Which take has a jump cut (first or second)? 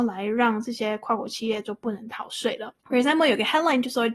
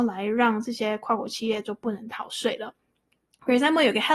first